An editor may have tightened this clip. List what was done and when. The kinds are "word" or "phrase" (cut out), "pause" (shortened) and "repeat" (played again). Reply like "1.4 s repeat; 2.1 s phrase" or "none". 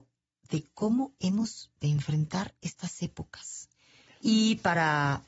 none